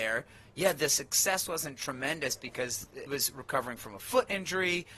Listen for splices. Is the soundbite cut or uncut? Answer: cut